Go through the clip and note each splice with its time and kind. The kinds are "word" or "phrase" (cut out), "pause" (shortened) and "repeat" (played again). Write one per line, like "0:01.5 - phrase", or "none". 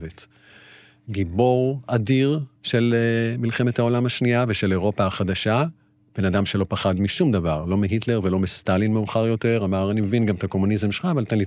0:02.6 - pause